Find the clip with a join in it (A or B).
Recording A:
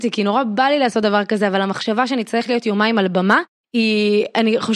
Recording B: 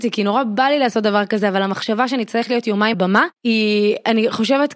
B